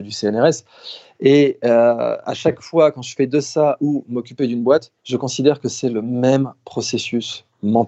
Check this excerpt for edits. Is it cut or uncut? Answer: cut